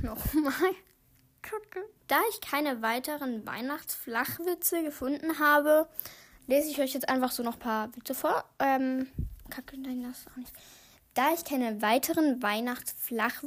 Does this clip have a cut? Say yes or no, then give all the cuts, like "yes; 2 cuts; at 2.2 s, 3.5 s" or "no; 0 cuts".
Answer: yes; 1 cut; at 2.0 s